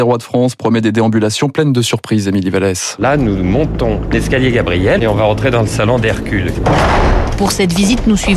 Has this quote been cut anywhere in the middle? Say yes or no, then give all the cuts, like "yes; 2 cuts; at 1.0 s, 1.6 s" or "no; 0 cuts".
no; 0 cuts